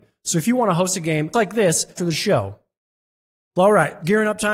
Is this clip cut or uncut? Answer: cut